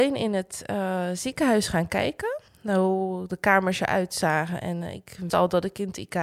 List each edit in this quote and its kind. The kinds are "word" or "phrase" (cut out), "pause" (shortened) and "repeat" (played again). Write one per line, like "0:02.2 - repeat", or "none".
0:02.5 - pause
0:05.3 - word